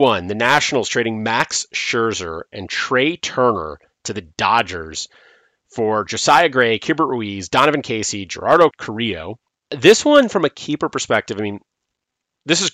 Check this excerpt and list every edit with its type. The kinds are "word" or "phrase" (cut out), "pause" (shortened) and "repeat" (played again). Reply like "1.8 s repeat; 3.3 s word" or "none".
none